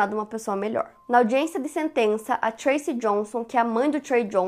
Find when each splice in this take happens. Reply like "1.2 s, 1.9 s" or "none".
none